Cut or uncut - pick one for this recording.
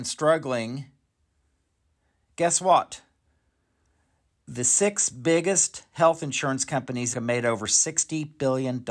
cut